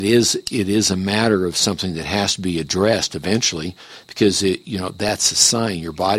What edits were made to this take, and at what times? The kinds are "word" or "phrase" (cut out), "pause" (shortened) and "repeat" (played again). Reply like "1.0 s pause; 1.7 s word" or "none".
none